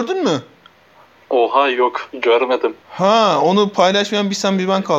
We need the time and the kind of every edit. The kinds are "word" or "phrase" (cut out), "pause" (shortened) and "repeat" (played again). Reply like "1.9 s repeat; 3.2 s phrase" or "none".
2.8 s pause